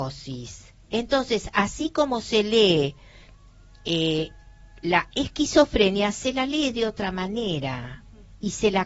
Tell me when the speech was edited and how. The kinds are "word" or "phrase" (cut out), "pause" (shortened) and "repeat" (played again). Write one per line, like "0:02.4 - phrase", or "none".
none